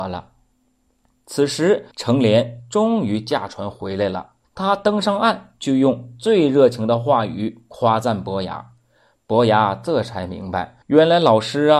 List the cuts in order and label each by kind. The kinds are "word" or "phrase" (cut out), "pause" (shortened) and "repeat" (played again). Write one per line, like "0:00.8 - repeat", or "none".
0:01.9 - pause
0:04.4 - pause
0:10.8 - pause